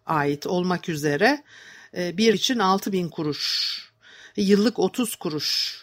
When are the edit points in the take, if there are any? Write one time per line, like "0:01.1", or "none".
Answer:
0:02.3